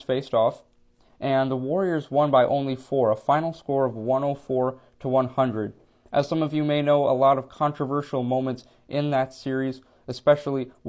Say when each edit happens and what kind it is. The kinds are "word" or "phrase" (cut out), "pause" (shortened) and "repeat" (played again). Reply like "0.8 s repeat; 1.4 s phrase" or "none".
none